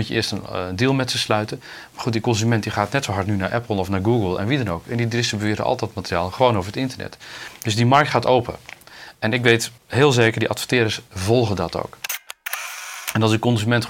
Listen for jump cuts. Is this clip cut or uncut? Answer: cut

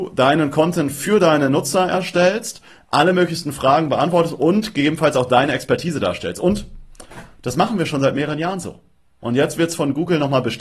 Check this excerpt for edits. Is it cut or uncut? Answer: uncut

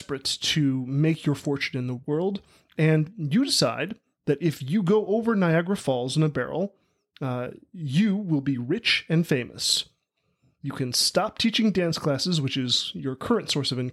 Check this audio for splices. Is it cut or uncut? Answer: uncut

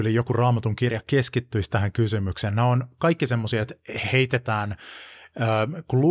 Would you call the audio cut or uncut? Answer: uncut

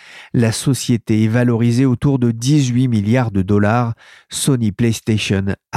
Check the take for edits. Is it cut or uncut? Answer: uncut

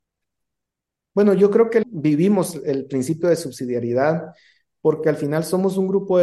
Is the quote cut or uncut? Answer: cut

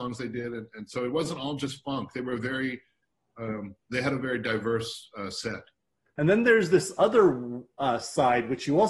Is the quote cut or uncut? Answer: uncut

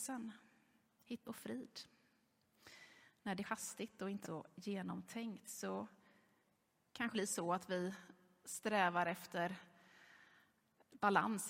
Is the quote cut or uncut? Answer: cut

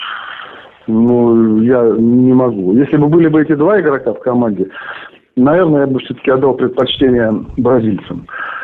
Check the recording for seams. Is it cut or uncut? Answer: uncut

